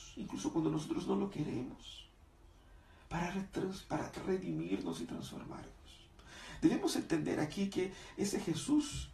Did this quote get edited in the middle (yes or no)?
no